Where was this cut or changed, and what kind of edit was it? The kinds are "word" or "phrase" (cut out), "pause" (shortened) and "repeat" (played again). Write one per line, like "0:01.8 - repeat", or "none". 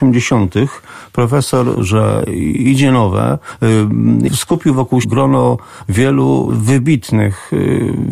0:01.7 - word
0:04.3 - word
0:05.0 - word
0:06.5 - word